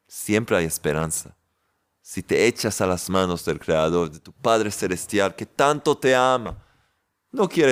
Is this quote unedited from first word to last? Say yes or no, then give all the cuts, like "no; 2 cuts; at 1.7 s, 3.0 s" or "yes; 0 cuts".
yes; 0 cuts